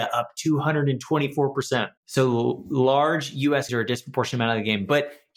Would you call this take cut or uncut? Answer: cut